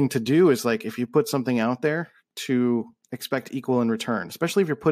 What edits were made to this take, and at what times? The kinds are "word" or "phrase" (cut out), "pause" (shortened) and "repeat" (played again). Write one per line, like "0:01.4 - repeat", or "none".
0:03.0 - pause